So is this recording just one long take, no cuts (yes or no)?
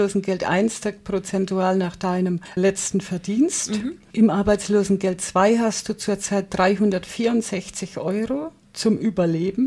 no